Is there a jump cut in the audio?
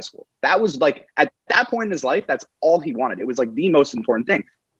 no; 0 cuts

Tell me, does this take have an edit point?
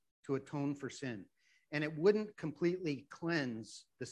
no; 0 cuts

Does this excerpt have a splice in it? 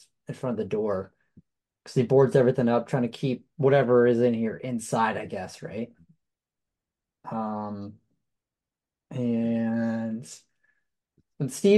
no; 0 cuts

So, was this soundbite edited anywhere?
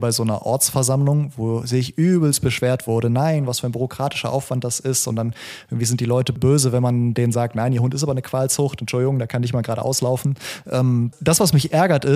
no; 0 cuts

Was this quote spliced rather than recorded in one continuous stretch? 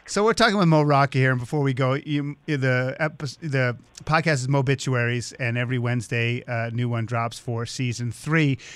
no; 0 cuts

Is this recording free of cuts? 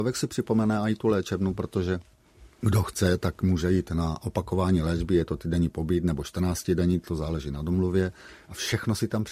yes; 0 cuts

